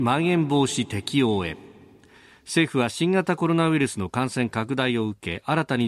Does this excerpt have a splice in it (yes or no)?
no